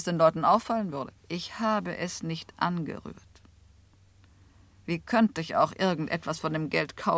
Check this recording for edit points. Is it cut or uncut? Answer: cut